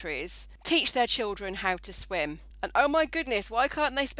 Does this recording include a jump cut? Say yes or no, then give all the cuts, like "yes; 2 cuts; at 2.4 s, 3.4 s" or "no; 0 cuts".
no; 0 cuts